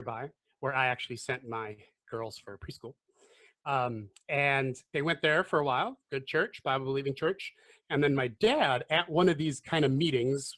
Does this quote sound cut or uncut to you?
uncut